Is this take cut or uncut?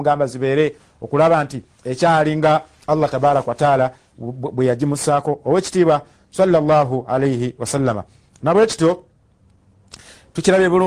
uncut